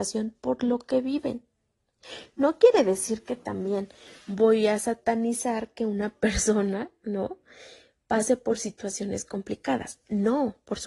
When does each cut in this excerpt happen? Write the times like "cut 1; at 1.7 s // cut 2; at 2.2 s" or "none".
none